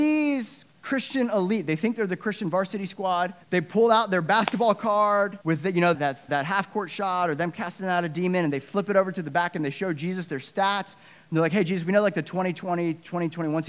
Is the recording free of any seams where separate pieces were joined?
no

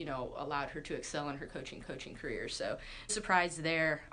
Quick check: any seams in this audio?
yes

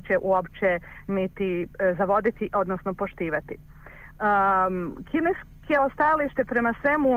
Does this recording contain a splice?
no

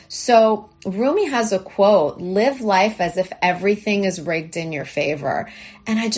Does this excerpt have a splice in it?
no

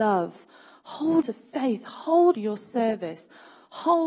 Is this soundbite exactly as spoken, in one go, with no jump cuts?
no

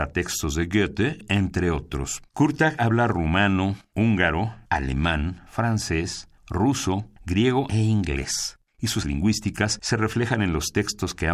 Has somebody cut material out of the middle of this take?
yes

